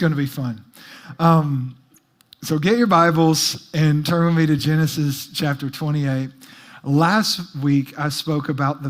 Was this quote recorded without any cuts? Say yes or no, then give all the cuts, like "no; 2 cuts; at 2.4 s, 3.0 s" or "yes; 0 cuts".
yes; 0 cuts